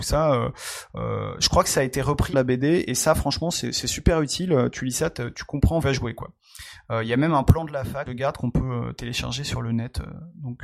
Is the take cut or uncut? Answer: cut